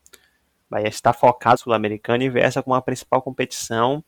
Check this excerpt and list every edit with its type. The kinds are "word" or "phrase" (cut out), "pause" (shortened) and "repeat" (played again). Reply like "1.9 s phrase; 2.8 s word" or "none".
1.6 s word